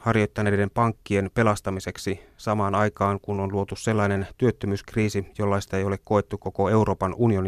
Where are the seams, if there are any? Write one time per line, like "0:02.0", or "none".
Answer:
none